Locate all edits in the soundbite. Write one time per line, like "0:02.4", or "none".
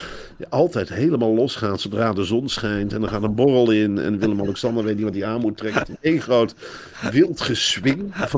none